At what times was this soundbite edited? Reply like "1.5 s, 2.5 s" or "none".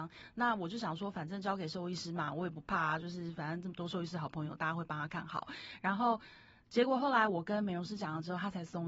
none